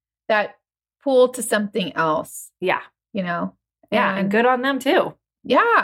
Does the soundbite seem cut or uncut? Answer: uncut